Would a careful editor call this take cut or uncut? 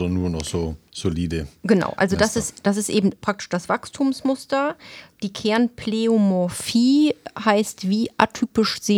uncut